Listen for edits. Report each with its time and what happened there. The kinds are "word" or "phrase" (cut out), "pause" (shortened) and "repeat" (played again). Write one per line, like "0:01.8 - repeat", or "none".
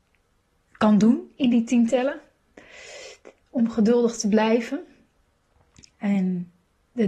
none